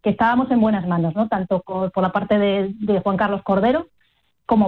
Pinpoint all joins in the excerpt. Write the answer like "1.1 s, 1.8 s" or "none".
none